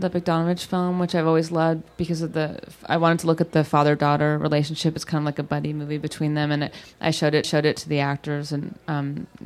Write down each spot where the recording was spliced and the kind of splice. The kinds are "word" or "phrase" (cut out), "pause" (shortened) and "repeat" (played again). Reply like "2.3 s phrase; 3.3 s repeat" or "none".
7.4 s repeat